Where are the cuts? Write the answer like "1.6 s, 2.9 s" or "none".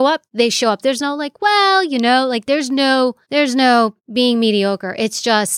3.2 s, 4.0 s